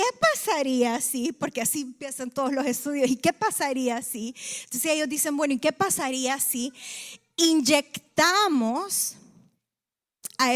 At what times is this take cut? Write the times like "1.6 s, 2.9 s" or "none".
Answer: none